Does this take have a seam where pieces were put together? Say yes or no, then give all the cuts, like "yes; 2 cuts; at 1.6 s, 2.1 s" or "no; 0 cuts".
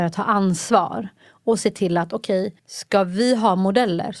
yes; 1 cut; at 2.6 s